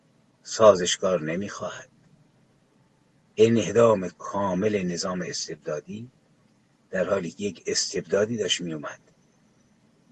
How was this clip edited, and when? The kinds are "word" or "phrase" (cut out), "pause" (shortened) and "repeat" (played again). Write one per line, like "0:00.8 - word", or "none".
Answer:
none

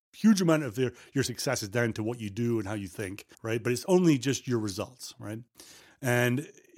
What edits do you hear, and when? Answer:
0:03.3 - pause

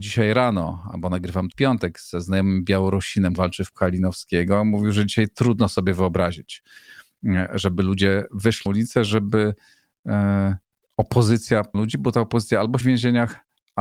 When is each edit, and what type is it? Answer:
0:01.5 - word
0:03.4 - word
0:03.7 - word
0:08.7 - word
0:11.7 - word
0:12.8 - word

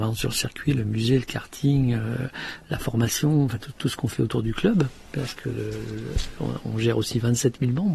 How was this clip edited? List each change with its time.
none

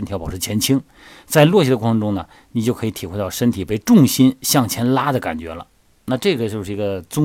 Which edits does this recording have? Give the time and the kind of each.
none

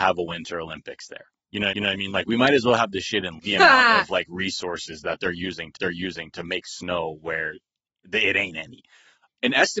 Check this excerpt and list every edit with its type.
0:01.7 - repeat
0:03.4 - phrase
0:05.8 - repeat

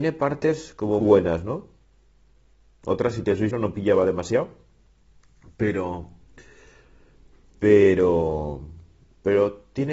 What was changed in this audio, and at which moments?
0:01.0 - word
0:03.5 - word

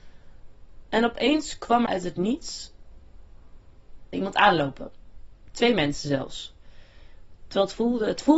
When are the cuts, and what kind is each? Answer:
0:01.9 - word
0:04.1 - word

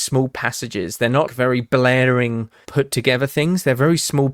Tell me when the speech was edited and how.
0:01.3 - word
0:02.6 - word

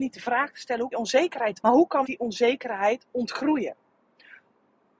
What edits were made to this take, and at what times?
0:00.9 - phrase
0:01.6 - phrase
0:02.0 - word

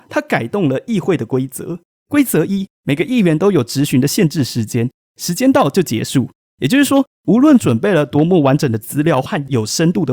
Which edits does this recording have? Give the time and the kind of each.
none

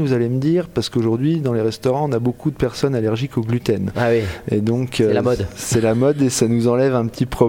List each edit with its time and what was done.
none

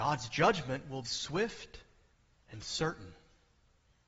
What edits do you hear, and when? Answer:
0:01.0 - word
0:02.1 - pause

